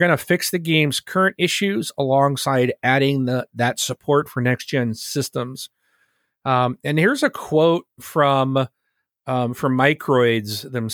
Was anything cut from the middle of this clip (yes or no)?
no